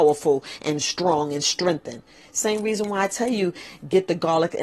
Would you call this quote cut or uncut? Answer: uncut